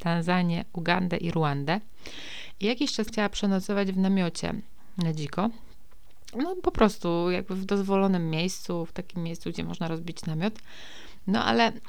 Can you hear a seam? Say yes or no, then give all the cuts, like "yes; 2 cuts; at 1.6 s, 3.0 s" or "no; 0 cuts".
yes; 1 cut; at 3.1 s